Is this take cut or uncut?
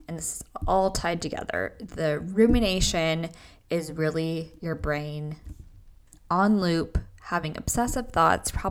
uncut